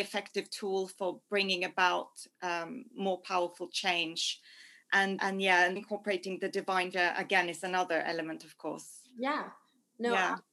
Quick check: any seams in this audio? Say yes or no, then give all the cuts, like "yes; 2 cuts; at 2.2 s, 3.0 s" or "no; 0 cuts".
yes; 3 cuts; at 5.2 s, 5.8 s, 6.9 s